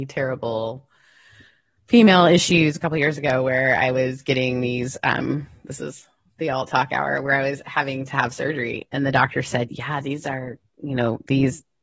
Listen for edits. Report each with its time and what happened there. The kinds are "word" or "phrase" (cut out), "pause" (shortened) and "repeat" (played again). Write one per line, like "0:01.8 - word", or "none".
none

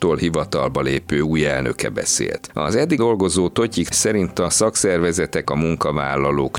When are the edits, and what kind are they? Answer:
0:03.0 - word
0:03.9 - word
0:05.4 - word

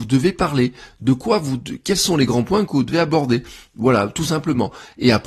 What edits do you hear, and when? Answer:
none

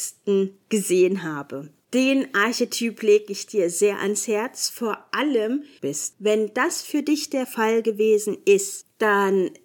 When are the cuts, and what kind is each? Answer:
0:05.8 - phrase

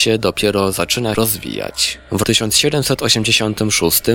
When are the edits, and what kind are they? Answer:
0:01.1 - word
0:02.2 - word

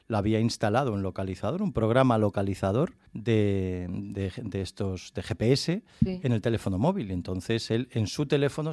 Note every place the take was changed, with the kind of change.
0:03.1 - pause

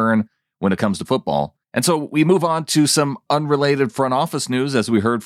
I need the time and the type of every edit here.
0:01.0 - word
0:01.6 - pause

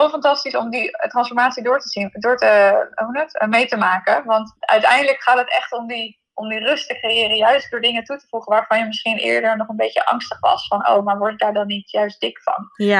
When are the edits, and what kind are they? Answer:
0:04.6 - pause

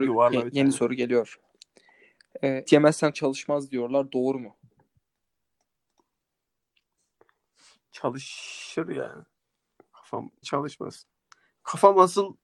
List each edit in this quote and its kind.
0:02.7 - word
0:03.1 - word
0:10.4 - word

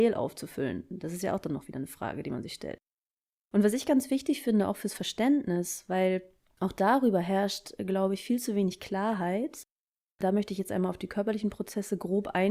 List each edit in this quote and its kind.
none

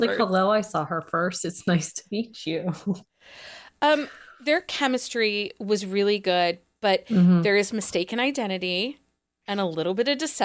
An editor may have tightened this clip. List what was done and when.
none

